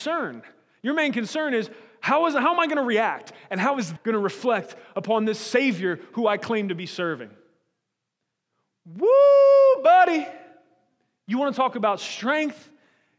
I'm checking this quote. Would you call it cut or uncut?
cut